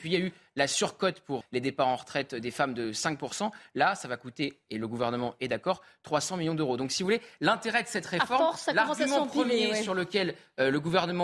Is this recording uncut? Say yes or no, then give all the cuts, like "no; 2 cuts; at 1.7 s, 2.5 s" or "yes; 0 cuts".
no; 1 cut; at 1.4 s